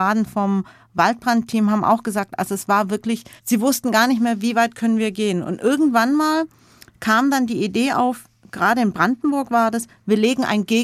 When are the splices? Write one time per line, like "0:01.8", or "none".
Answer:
0:03.4